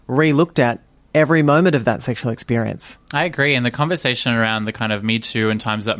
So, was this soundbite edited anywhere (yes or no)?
no